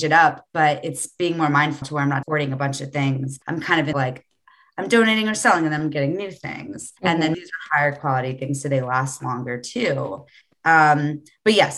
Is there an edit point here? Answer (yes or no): yes